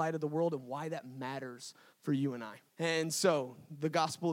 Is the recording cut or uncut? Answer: cut